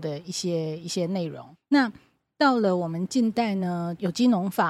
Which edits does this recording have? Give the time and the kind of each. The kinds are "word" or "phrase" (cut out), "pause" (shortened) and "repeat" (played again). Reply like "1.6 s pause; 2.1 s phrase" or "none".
1.5 s pause